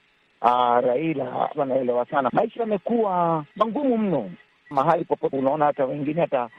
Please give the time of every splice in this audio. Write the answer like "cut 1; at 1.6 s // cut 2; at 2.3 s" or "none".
cut 1; at 1.5 s // cut 2; at 2.3 s // cut 3; at 3.5 s // cut 4; at 4.7 s // cut 5; at 5.3 s

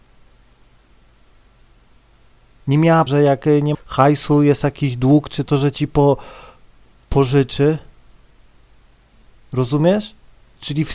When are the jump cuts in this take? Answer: cut 1; at 3.1 s // cut 2; at 3.7 s // cut 3; at 5.5 s

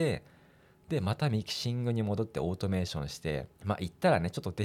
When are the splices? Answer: cut 1; at 3.5 s

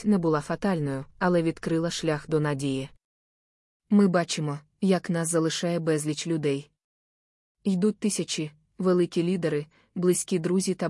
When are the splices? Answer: cut 1; at 1.1 s

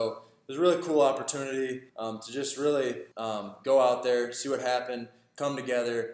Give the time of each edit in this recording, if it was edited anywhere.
cut 1; at 1.9 s // cut 2; at 3.1 s

